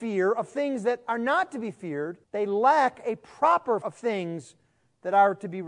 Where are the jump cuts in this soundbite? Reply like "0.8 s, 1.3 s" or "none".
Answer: 2.2 s, 3.8 s